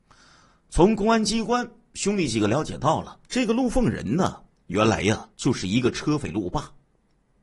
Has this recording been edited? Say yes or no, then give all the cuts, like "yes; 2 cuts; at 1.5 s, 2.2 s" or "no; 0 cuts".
yes; 3 cuts; at 3.3 s, 4.5 s, 5.3 s